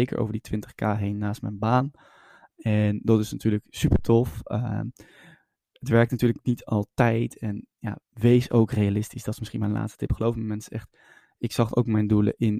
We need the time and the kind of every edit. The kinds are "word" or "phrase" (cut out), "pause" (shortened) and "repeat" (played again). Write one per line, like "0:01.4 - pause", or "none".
0:08.0 - pause